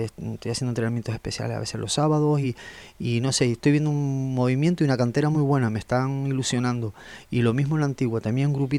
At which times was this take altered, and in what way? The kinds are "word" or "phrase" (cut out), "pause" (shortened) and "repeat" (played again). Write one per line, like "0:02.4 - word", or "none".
none